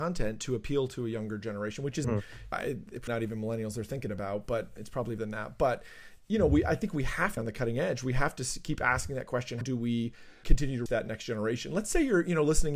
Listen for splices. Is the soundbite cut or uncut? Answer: cut